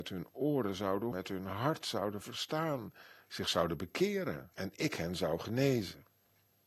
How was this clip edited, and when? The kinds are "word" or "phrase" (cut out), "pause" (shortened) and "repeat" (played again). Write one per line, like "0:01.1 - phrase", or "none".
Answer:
0:01.1 - word
0:04.5 - pause